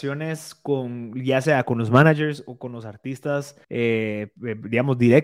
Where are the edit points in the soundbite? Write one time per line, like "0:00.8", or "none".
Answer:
0:03.6